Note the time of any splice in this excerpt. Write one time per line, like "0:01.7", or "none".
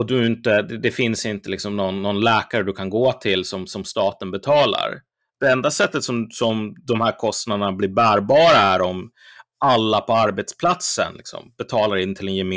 none